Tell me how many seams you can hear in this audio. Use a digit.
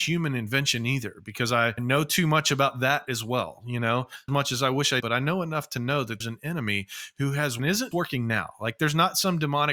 5